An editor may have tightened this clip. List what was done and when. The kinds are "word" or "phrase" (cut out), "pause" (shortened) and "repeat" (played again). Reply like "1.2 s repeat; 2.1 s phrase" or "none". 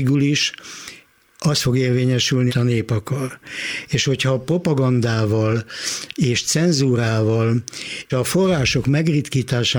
2.5 s word; 8.1 s word